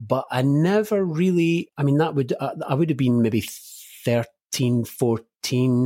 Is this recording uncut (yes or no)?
yes